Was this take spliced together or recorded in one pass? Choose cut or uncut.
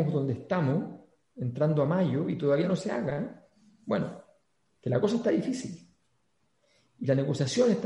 uncut